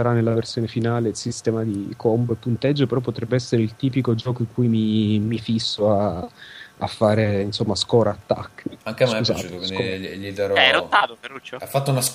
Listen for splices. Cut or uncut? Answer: cut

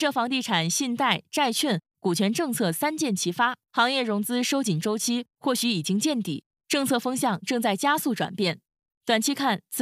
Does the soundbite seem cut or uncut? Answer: cut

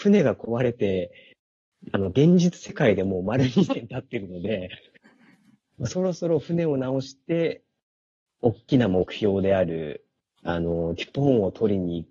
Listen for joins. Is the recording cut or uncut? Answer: uncut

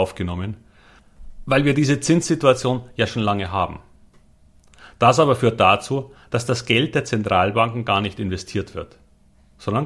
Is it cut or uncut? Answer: uncut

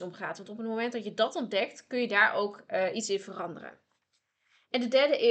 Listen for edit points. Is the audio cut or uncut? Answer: uncut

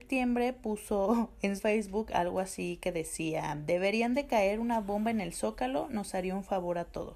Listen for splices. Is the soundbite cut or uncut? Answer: cut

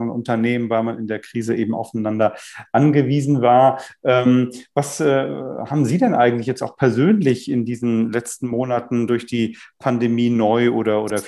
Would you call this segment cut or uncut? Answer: uncut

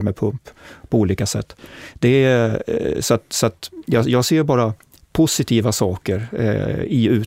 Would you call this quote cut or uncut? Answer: uncut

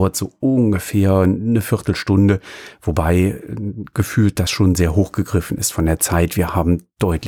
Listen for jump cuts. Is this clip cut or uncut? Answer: uncut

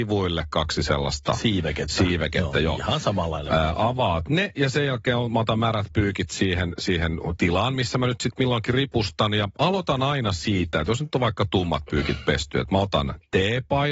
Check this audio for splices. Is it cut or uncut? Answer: uncut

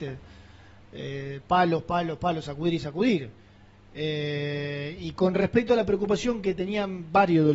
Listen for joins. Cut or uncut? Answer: uncut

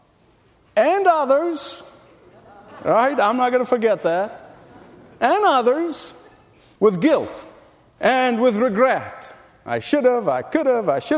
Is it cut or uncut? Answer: uncut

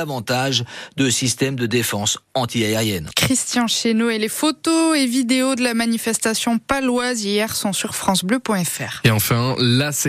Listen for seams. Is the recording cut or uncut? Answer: uncut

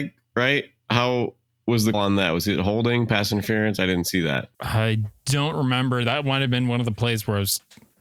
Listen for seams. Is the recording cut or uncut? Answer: cut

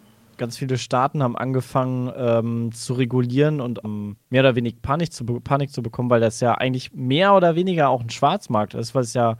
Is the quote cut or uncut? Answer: cut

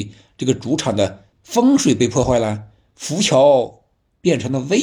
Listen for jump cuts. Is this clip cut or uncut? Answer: cut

